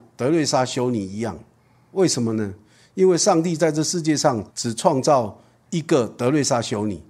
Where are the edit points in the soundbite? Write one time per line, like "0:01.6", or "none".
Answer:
0:04.5